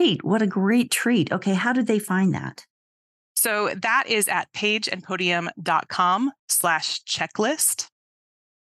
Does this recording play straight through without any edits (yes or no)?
yes